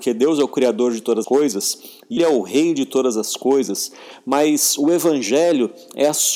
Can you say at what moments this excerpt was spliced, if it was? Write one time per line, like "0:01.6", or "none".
0:01.2
0:02.2